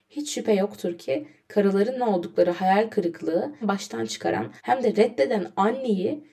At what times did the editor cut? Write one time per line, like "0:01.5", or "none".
0:02.0
0:03.6
0:04.6